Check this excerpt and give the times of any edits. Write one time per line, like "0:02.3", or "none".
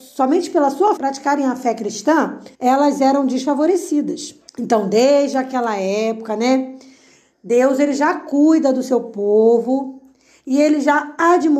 0:01.0
0:02.5
0:04.5

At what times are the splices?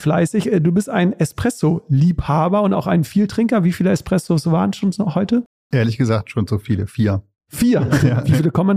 none

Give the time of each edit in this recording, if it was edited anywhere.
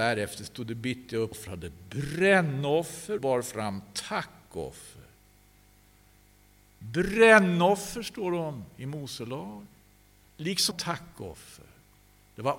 0:01.3
0:03.2
0:10.7

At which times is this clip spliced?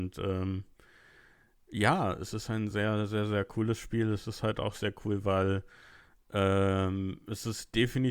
none

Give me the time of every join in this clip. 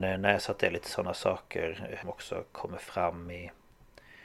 0:02.0

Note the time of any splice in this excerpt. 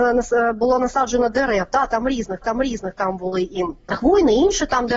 0:02.4

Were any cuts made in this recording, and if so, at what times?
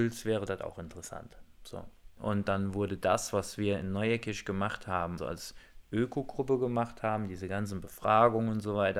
0:05.2

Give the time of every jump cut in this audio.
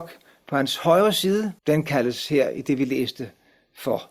0:01.6

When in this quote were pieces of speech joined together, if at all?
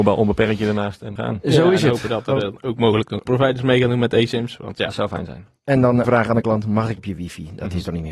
0:01.2
0:03.3
0:06.0
0:07.0

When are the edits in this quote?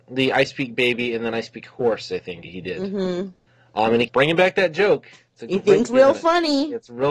0:02.4
0:04.1
0:05.9

